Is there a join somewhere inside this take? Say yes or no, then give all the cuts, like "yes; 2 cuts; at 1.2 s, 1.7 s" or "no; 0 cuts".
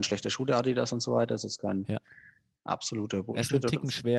no; 0 cuts